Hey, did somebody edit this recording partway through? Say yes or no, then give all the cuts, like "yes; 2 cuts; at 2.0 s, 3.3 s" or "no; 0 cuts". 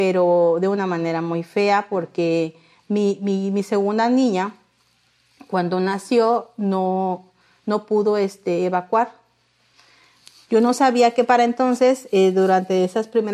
no; 0 cuts